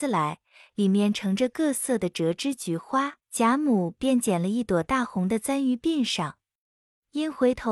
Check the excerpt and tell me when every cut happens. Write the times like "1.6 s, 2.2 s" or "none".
3.2 s